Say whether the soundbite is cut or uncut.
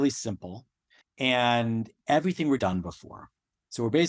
cut